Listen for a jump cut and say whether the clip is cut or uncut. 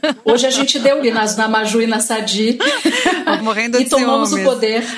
cut